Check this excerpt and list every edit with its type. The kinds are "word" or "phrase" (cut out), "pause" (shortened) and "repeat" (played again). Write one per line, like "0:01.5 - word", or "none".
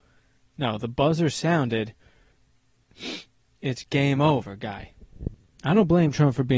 none